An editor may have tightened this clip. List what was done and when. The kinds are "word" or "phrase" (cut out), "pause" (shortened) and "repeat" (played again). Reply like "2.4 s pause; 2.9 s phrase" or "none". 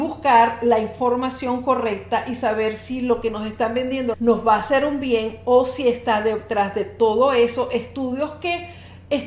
4.1 s word